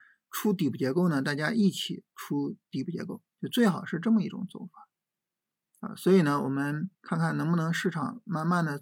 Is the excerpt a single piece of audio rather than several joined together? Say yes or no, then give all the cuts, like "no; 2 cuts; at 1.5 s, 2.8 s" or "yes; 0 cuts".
no; 3 cuts; at 2.6 s, 3.3 s, 6.9 s